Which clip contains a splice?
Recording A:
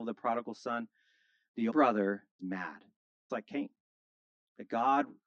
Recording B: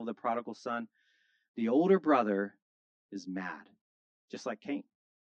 A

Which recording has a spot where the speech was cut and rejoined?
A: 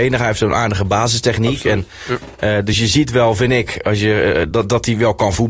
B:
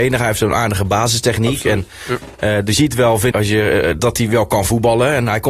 B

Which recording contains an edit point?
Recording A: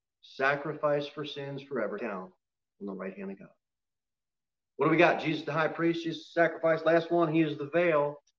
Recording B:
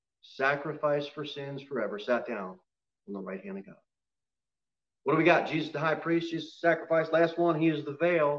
A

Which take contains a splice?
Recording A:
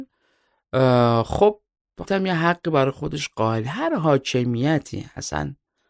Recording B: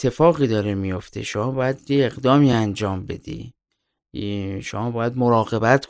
A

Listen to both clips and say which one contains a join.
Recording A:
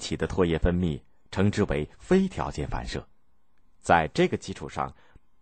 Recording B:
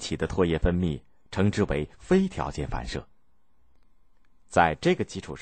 A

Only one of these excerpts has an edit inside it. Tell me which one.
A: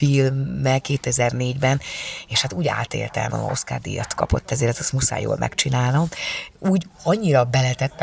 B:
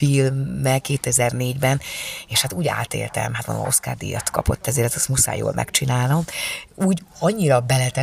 A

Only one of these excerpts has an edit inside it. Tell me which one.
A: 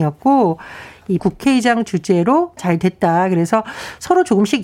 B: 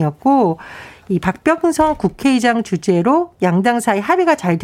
A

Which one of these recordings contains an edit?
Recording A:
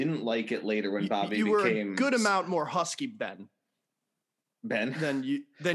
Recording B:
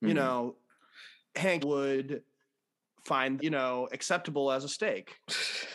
B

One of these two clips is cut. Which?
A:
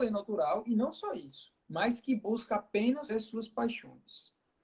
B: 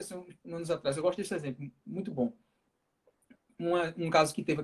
A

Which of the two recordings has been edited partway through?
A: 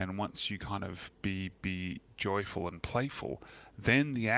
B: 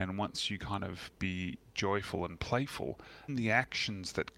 B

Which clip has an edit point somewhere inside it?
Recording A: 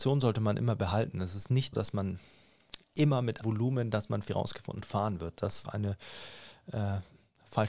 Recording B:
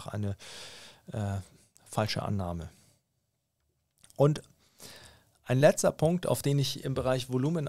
A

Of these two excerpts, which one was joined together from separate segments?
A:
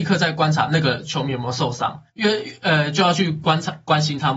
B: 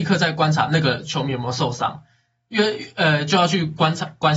A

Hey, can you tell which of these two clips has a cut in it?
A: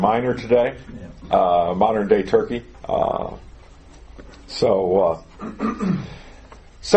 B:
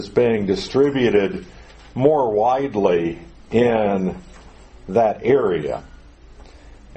A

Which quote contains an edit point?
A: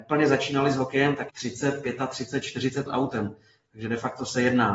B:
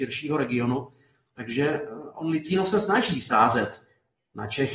A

